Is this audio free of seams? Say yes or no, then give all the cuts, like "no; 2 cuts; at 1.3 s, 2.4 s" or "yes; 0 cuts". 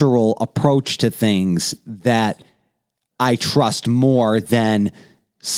yes; 0 cuts